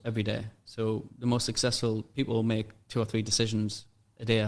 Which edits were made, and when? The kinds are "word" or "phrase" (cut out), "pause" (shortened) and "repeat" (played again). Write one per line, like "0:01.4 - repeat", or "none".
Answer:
none